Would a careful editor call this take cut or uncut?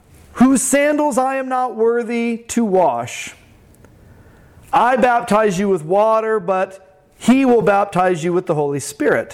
uncut